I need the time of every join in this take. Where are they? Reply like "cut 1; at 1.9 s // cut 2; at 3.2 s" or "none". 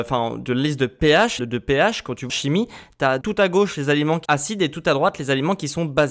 cut 1; at 1.4 s // cut 2; at 2.3 s // cut 3; at 3.2 s // cut 4; at 4.3 s

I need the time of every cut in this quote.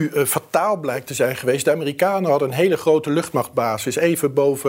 none

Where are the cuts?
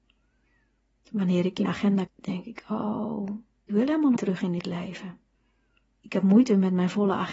cut 1; at 1.6 s // cut 2; at 2.1 s // cut 3; at 3.7 s // cut 4; at 4.2 s

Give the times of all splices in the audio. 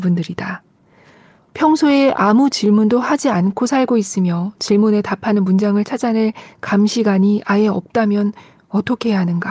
none

